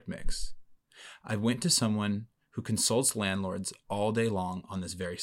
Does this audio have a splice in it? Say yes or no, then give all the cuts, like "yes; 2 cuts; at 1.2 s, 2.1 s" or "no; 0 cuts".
no; 0 cuts